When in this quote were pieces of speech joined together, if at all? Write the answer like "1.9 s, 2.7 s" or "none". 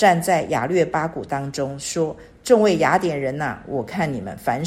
none